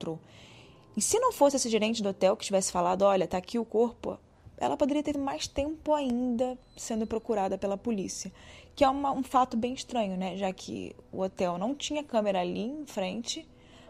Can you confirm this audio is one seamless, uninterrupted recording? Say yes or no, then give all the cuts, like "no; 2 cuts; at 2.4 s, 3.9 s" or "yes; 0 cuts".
no; 1 cut; at 5.1 s